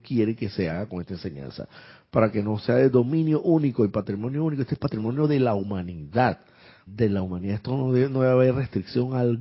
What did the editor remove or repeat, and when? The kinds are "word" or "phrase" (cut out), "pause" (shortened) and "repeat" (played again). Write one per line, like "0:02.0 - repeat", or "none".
0:06.9 - word